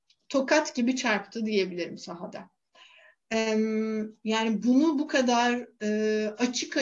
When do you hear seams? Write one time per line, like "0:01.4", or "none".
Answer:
none